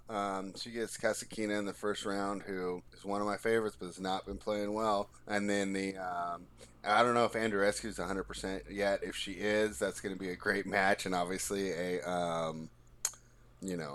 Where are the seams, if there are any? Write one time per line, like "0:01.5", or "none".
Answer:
0:02.9
0:05.2